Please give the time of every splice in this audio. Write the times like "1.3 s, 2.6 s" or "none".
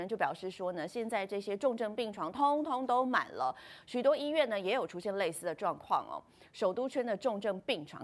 none